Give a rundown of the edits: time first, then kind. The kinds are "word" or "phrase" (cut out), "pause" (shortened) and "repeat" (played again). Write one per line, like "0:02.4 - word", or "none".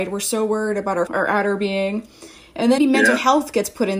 0:01.1 - word
0:02.8 - word